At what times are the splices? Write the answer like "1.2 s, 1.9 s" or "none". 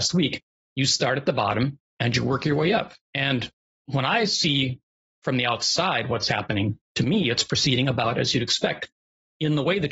none